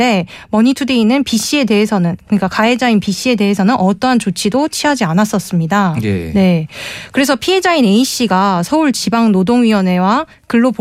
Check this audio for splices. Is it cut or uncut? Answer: uncut